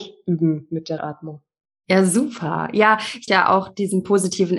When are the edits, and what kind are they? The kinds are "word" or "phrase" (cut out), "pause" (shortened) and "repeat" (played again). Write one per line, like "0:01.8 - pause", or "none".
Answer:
0:01.0 - word
0:03.3 - phrase